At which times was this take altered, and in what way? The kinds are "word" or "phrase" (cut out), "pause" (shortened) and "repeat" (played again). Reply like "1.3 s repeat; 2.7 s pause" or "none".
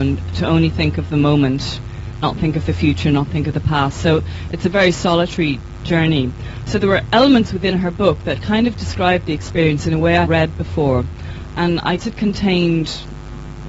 2.2 s word; 10.2 s phrase; 12.0 s word